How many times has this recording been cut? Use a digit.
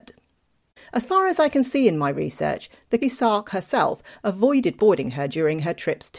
2